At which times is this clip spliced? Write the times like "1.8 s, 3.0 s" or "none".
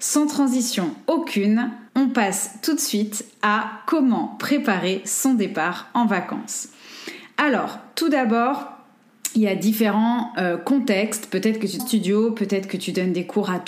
1.9 s, 11.8 s